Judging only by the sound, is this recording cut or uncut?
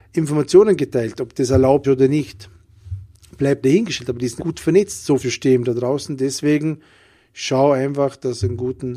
cut